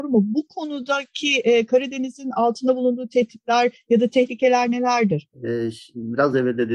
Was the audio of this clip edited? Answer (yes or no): no